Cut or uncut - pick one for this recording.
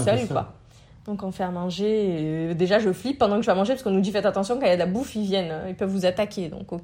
uncut